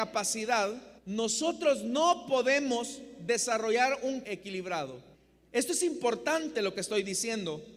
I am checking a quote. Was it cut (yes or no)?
yes